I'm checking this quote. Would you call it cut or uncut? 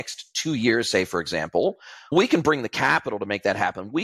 uncut